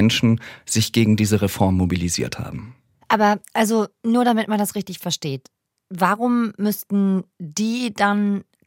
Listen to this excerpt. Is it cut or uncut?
uncut